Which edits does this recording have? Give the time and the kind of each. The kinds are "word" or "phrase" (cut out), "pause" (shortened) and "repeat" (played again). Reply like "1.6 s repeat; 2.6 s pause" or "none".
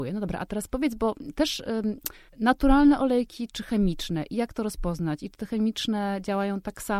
2.3 s pause